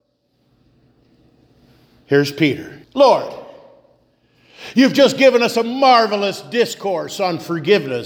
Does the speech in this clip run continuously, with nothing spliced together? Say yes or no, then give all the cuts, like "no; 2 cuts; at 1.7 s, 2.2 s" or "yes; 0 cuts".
no; 1 cut; at 2.8 s